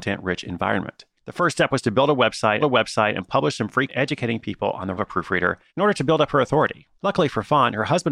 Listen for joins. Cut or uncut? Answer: cut